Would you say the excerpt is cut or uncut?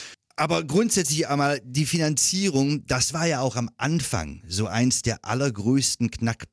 uncut